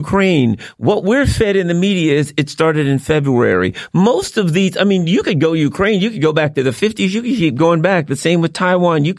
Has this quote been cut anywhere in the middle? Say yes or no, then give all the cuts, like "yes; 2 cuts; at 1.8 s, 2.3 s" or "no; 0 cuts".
no; 0 cuts